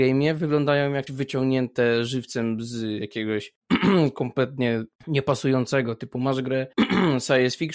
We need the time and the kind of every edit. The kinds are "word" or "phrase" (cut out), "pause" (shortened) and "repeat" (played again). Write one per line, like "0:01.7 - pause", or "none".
0:01.1 - word
0:03.6 - pause
0:04.9 - pause
0:06.7 - pause